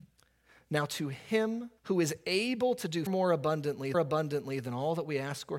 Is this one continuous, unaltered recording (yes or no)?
no